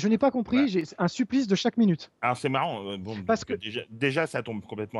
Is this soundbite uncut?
no; 1 cut; at 2.1 s

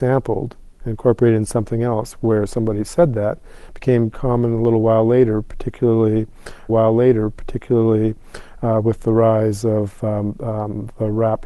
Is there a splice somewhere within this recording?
yes; 2 cuts; at 4.1 s, 6.7 s

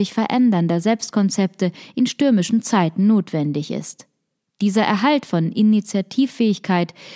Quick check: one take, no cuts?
yes; 0 cuts

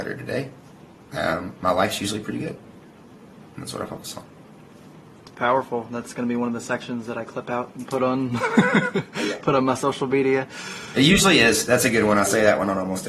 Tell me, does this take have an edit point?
no; 0 cuts

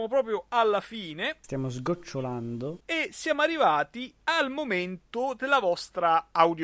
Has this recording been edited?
no; 0 cuts

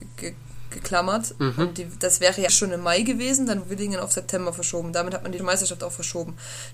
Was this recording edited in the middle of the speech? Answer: yes; 3 cuts; at 2.5 s, 3.6 s, 5.4 s

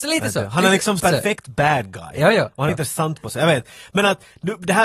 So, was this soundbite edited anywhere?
yes; 2 cuts; at 1.0 s, 2.7 s

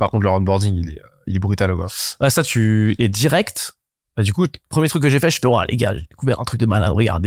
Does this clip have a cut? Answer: no; 0 cuts

